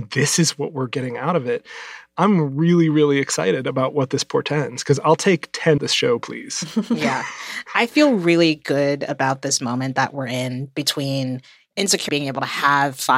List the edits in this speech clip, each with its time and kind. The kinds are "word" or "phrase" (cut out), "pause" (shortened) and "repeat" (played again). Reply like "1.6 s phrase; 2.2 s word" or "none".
5.8 s phrase; 12.1 s word